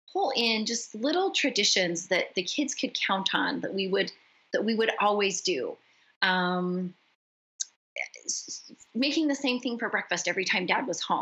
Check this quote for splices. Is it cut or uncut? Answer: uncut